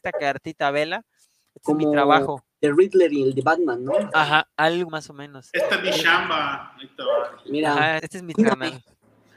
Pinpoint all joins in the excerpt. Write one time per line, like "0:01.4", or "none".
0:04.1
0:04.9
0:08.0
0:08.3